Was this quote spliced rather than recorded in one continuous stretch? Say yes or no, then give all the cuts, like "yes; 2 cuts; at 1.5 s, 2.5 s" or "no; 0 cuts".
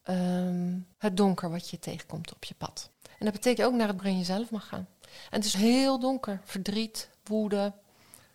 yes; 5 cuts; at 0.9 s, 2.9 s, 3.6 s, 4.0 s, 5.5 s